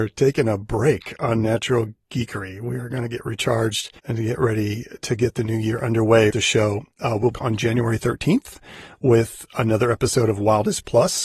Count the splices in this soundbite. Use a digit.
3